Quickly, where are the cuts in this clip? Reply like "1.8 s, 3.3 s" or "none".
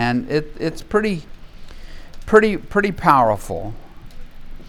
none